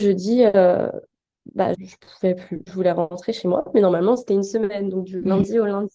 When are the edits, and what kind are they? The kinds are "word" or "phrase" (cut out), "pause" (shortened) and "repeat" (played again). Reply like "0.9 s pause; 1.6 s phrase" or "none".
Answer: 1.7 s word